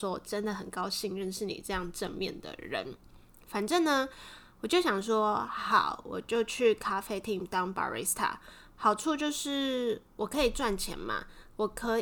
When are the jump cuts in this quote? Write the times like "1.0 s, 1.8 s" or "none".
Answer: none

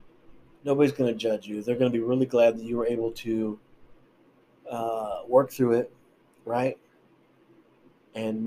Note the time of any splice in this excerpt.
none

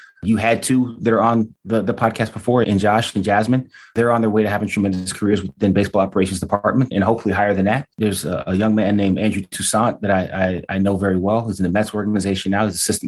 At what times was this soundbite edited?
2.6 s, 6.9 s, 7.9 s

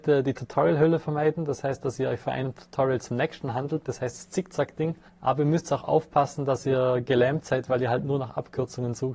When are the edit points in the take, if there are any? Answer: 5.1 s

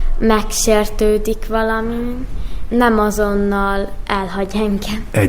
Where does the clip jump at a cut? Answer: 2.7 s

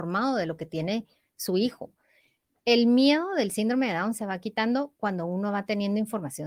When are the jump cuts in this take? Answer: none

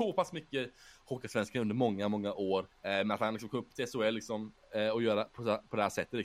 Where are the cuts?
2.7 s

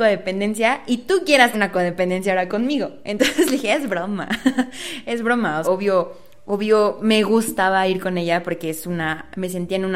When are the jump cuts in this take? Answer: 1.5 s, 5.6 s

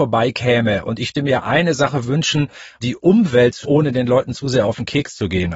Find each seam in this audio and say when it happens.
1.1 s, 2.8 s, 3.6 s

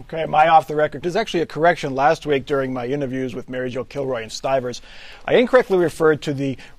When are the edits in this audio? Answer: 1.0 s, 4.3 s

